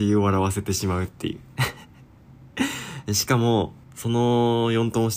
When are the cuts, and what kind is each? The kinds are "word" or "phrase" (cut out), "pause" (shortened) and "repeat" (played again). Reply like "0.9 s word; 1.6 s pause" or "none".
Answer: 3.8 s pause

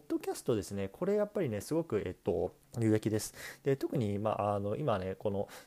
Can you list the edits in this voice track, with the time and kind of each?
2.6 s pause

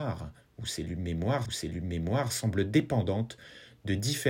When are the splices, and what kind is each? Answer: 1.4 s repeat

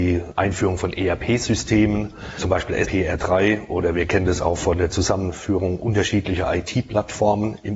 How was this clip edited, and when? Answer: 2.8 s word

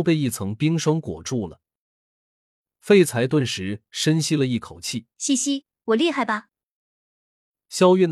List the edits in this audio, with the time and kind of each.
5.1 s pause

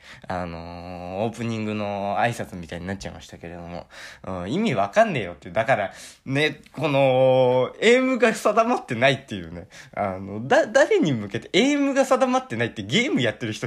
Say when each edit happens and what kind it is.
none

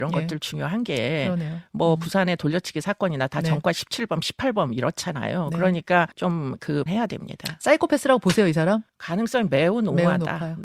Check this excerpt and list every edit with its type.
6.1 s pause; 6.9 s word; 8.9 s pause

